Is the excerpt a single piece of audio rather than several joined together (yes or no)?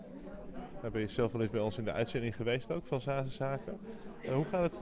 yes